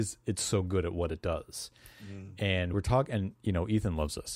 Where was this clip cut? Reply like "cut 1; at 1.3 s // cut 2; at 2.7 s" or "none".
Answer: cut 1; at 2.7 s